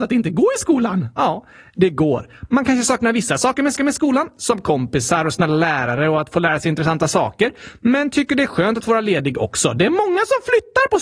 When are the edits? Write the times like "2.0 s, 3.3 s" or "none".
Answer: 3.8 s